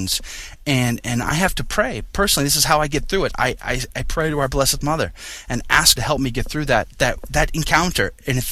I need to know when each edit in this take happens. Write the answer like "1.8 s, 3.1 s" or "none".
6.0 s